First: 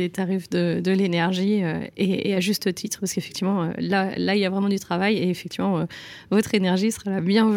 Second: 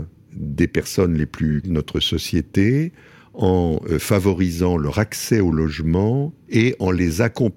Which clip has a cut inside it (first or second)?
second